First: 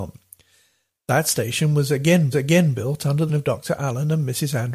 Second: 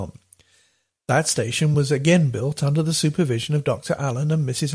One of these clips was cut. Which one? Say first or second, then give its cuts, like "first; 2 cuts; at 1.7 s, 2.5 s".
first; 2 cuts; at 2.3 s, 3.3 s